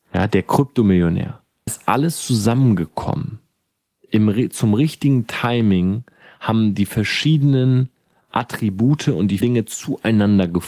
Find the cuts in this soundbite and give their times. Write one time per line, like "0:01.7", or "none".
0:01.7
0:09.4